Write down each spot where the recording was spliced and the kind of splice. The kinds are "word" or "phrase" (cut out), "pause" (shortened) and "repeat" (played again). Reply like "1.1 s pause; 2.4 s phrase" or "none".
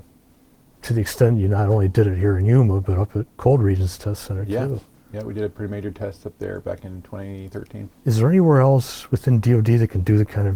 4.9 s pause; 8.0 s pause

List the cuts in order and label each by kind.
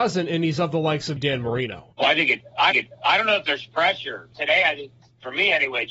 1.2 s word; 1.9 s pause; 2.7 s repeat; 4.3 s phrase

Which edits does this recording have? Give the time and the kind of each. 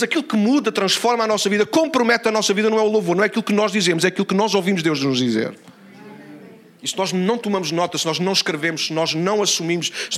none

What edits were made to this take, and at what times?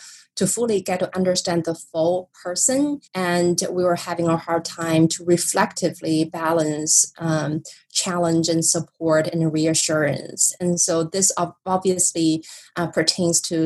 3.1 s pause

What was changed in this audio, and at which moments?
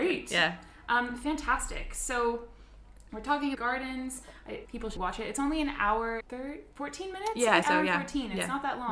3.5 s phrase; 4.6 s word; 5.0 s word; 6.2 s word; 7.6 s word

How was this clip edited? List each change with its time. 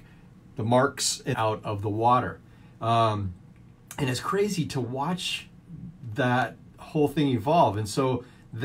1.3 s word

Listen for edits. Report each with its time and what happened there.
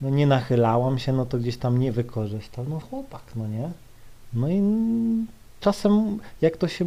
2.8 s word

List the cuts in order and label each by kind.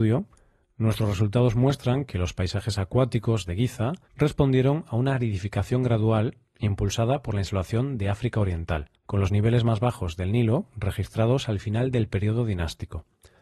4.0 s pause; 8.9 s pause

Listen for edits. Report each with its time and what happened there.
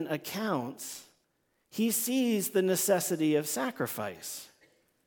1.2 s pause

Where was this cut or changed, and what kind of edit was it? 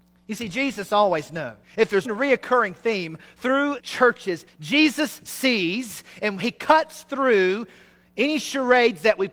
1.6 s pause; 2.0 s word; 3.8 s word; 4.5 s phrase

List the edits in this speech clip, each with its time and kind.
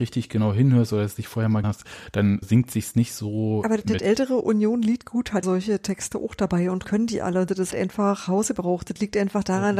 1.6 s word; 2.4 s word; 3.8 s word; 5.4 s word; 6.8 s word; 7.7 s word

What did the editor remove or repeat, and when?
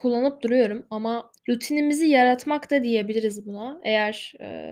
1.4 s pause

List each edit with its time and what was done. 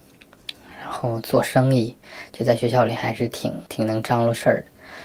3.7 s pause

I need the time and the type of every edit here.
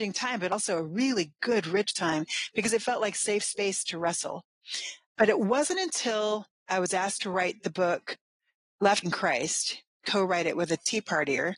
9.0 s word

